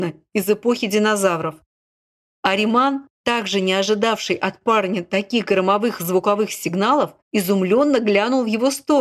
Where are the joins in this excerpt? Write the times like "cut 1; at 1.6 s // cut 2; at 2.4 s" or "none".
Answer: cut 1; at 7.2 s